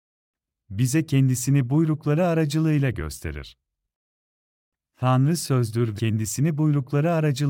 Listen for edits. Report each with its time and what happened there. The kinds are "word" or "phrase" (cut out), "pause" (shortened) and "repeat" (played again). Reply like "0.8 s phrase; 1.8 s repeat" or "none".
6.0 s word